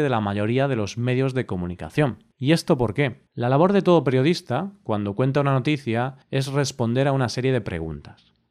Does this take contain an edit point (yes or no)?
yes